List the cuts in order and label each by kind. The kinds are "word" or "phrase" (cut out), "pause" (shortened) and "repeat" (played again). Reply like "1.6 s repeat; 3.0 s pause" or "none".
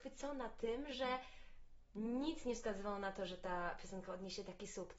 none